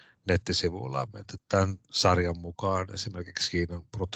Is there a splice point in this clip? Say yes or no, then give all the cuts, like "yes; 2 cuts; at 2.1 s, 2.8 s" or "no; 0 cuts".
yes; 1 cut; at 1.4 s